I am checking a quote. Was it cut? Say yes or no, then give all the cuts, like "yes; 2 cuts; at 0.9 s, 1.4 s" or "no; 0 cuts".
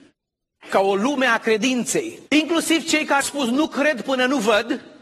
yes; 2 cuts; at 2.3 s, 3.2 s